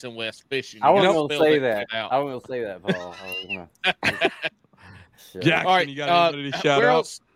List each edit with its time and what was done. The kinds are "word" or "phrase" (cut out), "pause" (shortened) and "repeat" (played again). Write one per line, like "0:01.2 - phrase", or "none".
none

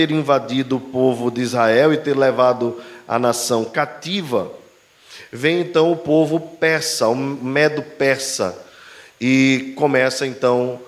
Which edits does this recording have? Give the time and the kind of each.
none

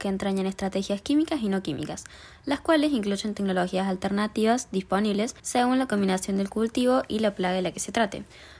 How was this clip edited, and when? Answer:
0:05.4 - pause

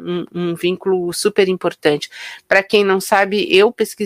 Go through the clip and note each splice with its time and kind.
none

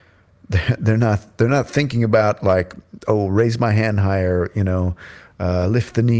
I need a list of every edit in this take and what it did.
none

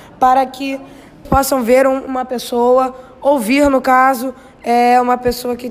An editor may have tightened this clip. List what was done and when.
0:01.2 - word

